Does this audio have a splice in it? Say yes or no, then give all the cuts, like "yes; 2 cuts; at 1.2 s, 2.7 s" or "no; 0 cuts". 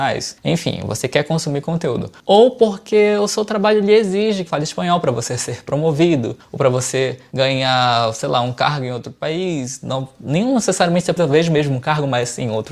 yes; 2 cuts; at 4.5 s, 11.2 s